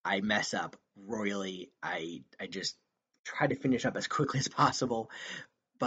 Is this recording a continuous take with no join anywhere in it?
yes; 0 cuts

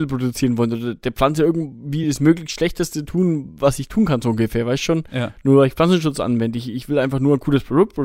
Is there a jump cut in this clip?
no; 0 cuts

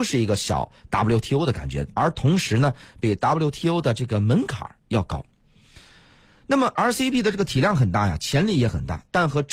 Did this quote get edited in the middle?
no; 0 cuts

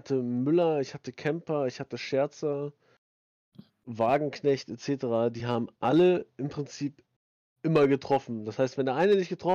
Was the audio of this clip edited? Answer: no; 0 cuts

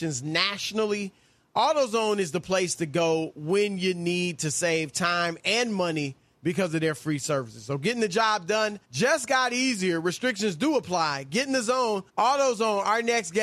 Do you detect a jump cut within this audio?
yes; 2 cuts; at 8.8 s, 12.1 s

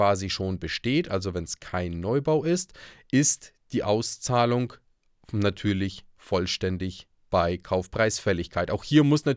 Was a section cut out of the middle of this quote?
no; 0 cuts

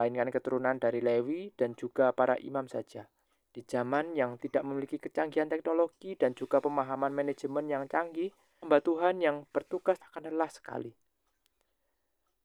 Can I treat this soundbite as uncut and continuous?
no; 3 cuts; at 3.2 s, 8.6 s, 10.0 s

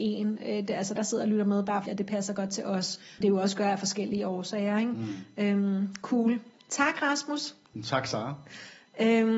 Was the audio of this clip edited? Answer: yes; 3 cuts; at 1.0 s, 1.9 s, 3.2 s

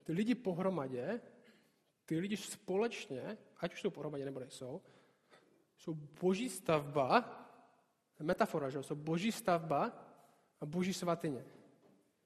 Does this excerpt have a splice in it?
no; 0 cuts

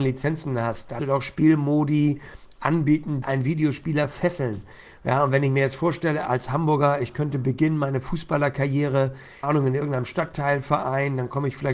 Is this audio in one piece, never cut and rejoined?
no; 3 cuts; at 1.0 s, 3.2 s, 9.4 s

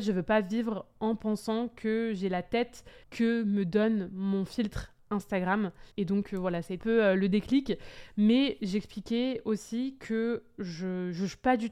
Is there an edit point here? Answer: yes; 3 cuts; at 3.0 s, 5.9 s, 6.8 s

